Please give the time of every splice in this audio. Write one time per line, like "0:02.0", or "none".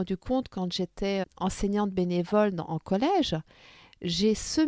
0:01.2